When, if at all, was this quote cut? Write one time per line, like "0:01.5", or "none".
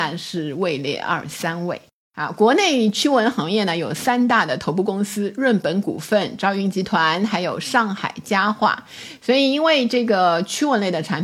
none